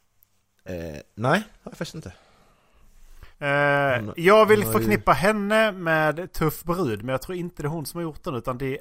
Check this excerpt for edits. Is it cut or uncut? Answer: cut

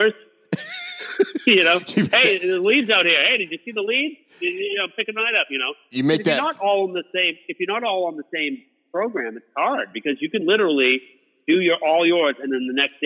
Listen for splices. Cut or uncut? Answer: uncut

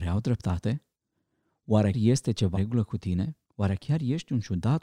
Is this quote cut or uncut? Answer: cut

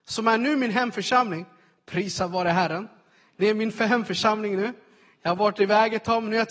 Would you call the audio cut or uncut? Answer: uncut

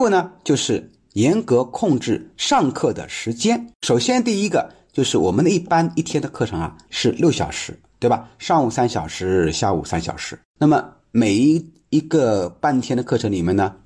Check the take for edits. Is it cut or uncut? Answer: cut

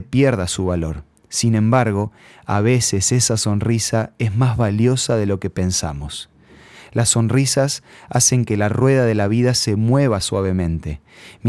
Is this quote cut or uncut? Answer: uncut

